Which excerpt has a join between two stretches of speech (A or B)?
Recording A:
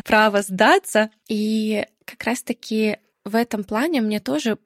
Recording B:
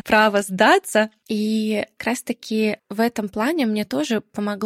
B